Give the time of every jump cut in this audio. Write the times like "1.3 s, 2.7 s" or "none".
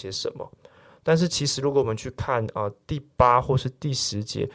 none